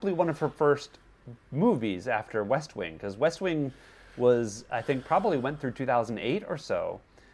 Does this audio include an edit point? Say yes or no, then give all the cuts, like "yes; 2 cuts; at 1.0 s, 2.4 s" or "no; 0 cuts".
no; 0 cuts